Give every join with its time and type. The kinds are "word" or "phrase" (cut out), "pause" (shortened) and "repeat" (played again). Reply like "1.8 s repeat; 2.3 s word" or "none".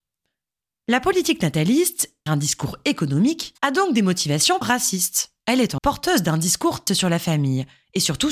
2.3 s word; 3.6 s pause; 4.6 s word; 5.4 s pause; 5.8 s word; 6.9 s word

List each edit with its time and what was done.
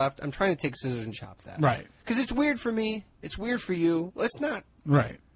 1.1 s word; 1.9 s pause

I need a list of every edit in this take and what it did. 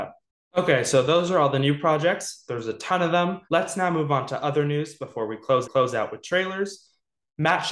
3.4 s pause; 5.6 s repeat

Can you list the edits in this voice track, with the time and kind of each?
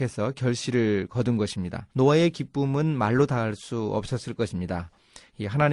1.9 s pause

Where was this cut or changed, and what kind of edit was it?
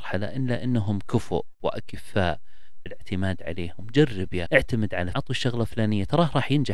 2.9 s word; 4.5 s word; 5.1 s word

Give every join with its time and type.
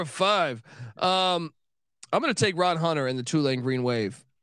none

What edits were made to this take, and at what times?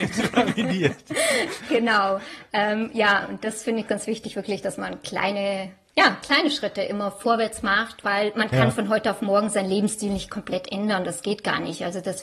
3.9 s word

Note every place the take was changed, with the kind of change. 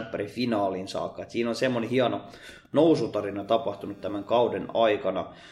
none

